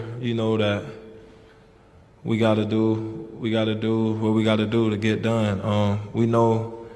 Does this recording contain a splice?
no; 0 cuts

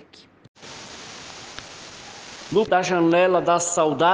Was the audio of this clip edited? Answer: yes; 1 cut; at 2.7 s

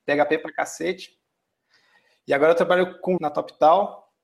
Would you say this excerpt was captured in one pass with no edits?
no; 1 cut; at 3.2 s

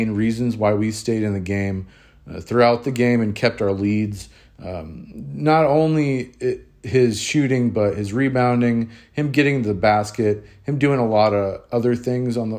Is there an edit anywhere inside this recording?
no; 0 cuts

